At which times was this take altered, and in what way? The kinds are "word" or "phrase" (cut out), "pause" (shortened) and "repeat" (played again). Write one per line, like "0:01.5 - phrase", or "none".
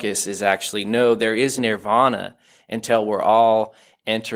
0:01.6 - word